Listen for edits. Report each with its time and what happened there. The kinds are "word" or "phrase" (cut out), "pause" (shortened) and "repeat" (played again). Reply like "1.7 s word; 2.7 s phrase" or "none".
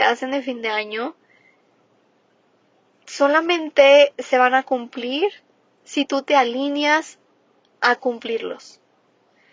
none